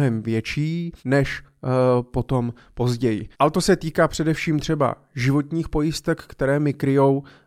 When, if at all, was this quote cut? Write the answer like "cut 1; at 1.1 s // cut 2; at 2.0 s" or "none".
cut 1; at 1.0 s // cut 2; at 3.3 s